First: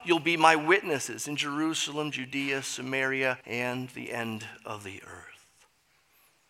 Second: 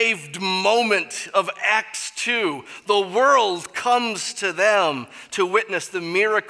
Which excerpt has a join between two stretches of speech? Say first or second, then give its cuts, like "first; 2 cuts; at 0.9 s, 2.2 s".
first; 1 cut; at 3.4 s